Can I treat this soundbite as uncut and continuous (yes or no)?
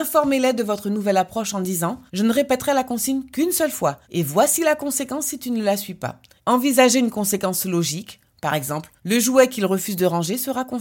no